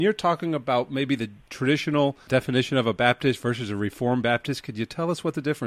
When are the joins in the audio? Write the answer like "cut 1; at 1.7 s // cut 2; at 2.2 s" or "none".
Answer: none